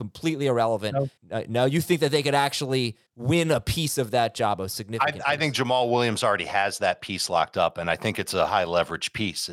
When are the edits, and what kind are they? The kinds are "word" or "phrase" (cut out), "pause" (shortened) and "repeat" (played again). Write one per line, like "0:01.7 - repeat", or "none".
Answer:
0:01.2 - pause
0:03.1 - pause